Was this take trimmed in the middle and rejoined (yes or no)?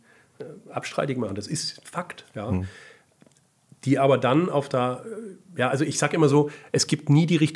no